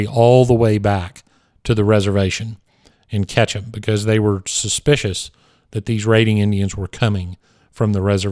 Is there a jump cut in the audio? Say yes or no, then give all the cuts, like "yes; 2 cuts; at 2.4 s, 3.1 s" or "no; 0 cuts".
no; 0 cuts